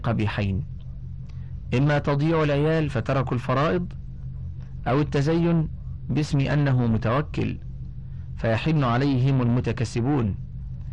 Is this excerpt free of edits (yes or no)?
yes